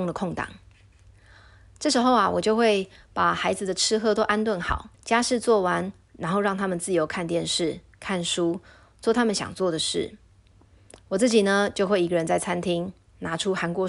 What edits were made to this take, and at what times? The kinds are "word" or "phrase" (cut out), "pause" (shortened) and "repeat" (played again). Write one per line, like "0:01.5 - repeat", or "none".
0:04.9 - pause

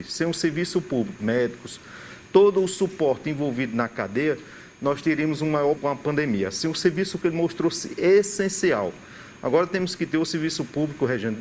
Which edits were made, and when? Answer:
0:01.2 - word
0:05.8 - word
0:07.2 - word

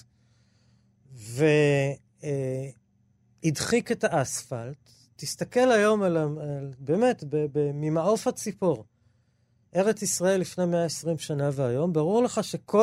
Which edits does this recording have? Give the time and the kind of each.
none

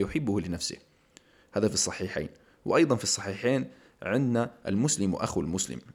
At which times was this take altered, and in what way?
none

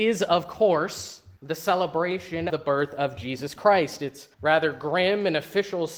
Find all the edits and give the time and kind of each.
0:01.4 - pause
0:02.5 - word
0:04.3 - pause

